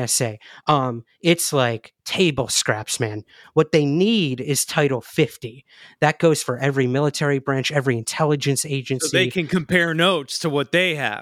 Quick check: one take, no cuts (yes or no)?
yes